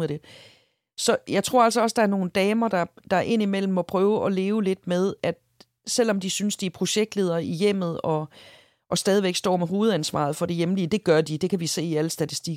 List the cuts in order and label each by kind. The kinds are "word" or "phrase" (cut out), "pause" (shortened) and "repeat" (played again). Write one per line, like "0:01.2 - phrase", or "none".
none